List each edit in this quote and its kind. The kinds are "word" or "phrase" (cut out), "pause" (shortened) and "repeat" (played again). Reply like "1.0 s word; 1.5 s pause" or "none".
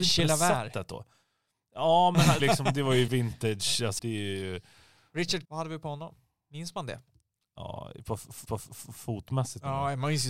2.4 s phrase; 3.1 s word; 4.0 s word; 5.5 s word; 8.5 s repeat